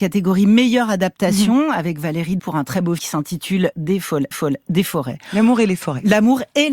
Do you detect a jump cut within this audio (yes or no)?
yes